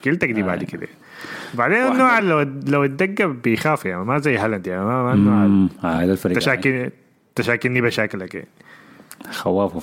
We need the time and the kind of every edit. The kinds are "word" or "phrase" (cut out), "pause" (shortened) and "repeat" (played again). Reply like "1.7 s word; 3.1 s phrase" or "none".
none